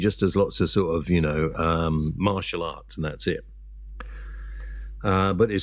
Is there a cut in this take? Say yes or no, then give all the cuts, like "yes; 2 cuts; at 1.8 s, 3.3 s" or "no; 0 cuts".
no; 0 cuts